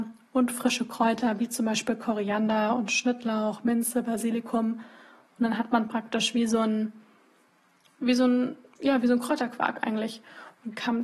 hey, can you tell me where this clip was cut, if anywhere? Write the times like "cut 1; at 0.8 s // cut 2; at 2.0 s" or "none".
none